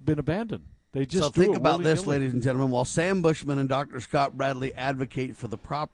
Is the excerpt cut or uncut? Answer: uncut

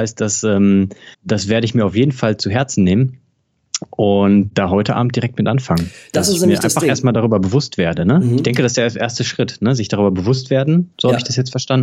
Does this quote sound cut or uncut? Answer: cut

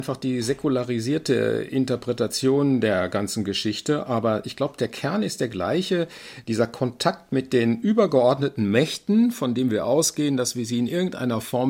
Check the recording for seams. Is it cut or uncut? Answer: uncut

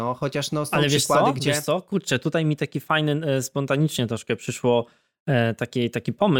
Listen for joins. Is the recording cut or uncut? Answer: uncut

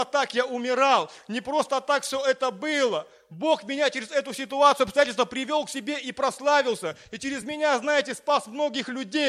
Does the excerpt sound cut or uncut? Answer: uncut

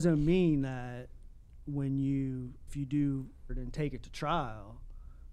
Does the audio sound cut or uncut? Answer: cut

